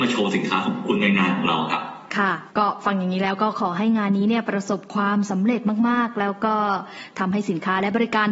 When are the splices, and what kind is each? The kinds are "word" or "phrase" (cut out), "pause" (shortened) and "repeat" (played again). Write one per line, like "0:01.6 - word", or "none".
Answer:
0:02.5 - pause